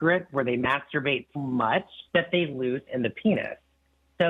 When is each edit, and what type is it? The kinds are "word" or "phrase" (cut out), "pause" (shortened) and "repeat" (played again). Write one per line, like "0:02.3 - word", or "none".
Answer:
0:01.3 - word
0:02.1 - pause
0:02.9 - word